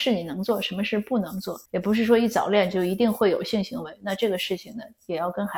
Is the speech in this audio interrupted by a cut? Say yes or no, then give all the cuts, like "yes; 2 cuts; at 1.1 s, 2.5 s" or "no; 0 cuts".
yes; 1 cut; at 1.7 s